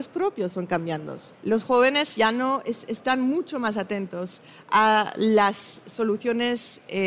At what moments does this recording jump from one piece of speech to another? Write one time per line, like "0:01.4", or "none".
0:01.3